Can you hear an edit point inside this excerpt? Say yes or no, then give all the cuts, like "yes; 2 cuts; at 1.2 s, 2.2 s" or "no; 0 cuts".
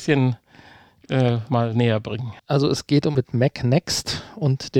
yes; 2 cuts; at 2.4 s, 3.1 s